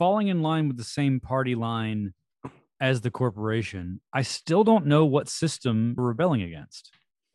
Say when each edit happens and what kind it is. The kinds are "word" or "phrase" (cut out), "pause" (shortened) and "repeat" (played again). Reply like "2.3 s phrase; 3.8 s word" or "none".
6.0 s word